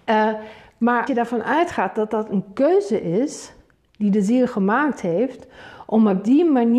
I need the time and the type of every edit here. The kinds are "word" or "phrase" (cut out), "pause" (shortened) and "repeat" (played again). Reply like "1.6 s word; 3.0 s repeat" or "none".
1.1 s word